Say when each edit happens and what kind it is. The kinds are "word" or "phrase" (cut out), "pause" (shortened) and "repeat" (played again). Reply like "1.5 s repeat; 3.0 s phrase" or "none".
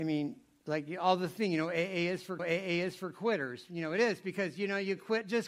2.4 s repeat